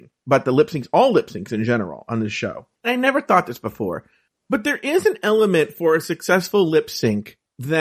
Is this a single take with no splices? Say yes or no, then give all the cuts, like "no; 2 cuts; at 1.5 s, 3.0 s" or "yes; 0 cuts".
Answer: no; 2 cuts; at 2.8 s, 4.3 s